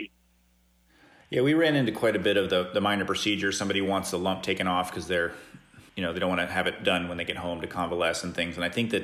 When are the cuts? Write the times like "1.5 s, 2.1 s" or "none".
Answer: 5.9 s

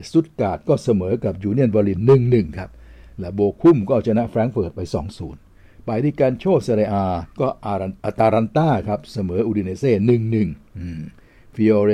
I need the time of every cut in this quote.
7.3 s, 8.0 s

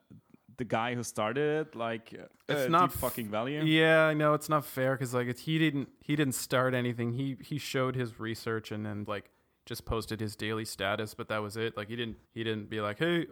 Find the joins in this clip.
2.3 s, 9.1 s, 12.3 s

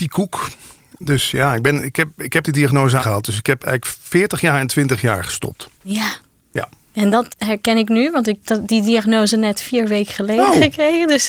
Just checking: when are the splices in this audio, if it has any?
2.4 s, 3.0 s, 5.7 s, 7.3 s, 8.4 s

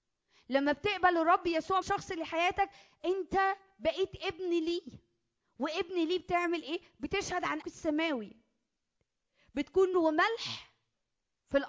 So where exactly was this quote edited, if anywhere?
1.8 s, 7.6 s, 9.9 s

